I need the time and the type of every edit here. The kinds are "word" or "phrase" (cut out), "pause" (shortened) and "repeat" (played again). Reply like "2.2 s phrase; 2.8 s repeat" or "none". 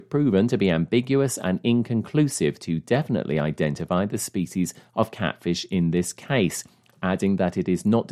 none